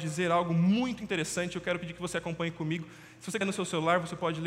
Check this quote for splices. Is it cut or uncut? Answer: cut